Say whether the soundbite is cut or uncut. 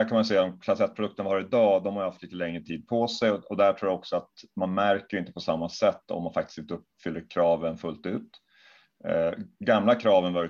uncut